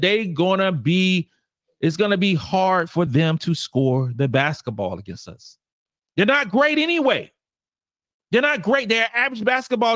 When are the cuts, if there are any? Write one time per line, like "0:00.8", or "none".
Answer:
none